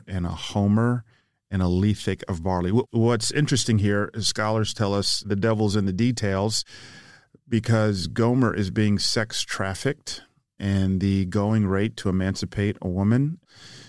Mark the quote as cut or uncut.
uncut